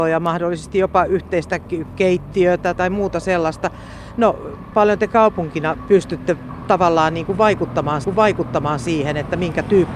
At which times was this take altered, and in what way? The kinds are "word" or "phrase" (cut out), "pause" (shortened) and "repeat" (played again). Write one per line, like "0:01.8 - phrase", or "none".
0:02.8 - word
0:04.7 - word
0:08.0 - repeat

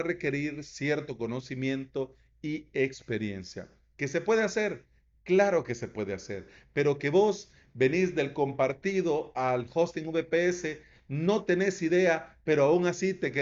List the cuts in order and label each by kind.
none

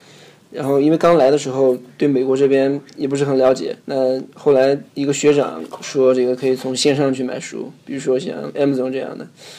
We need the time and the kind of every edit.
0:03.8 - pause
0:04.9 - pause

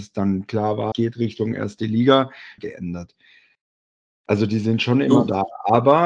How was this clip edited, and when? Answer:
0:00.9 - word
0:02.6 - phrase

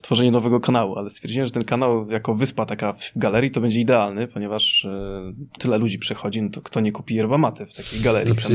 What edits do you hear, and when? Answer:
0:05.6 - word

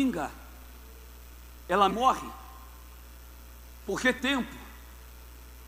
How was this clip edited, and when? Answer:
0:01.9 - phrase
0:04.2 - word

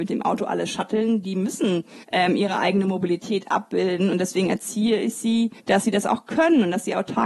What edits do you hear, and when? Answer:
0:02.0 - pause
0:05.6 - pause

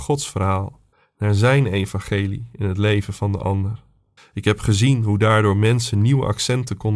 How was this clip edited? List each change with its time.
0:00.9 - pause
0:04.2 - pause

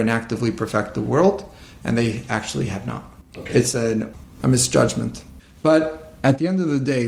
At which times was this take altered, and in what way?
none

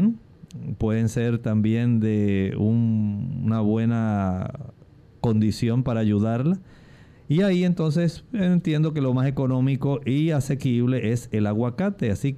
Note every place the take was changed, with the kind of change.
none

